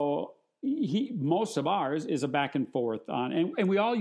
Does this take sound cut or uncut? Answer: uncut